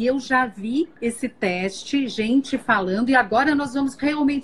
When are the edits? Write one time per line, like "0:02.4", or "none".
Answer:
none

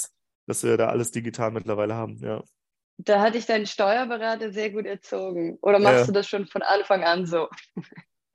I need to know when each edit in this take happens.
0:02.7

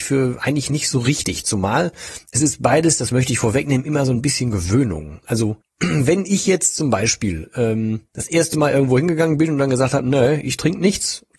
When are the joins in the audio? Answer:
0:05.6
0:08.1

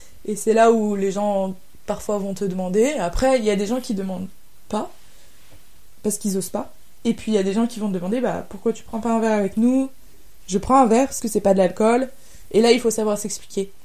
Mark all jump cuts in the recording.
0:11.2

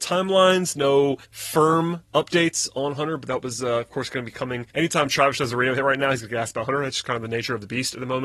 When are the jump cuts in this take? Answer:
0:01.2
0:04.7

